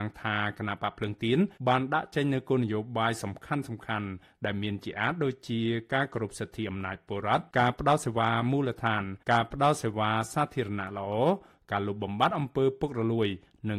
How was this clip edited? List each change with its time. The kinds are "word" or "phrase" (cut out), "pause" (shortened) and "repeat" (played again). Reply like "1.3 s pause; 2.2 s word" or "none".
1.6 s pause; 7.5 s pause; 9.2 s pause